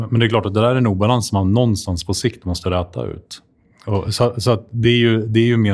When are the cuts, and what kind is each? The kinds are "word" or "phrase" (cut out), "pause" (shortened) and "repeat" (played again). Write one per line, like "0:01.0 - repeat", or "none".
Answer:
none